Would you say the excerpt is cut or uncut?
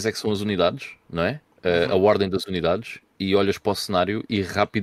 uncut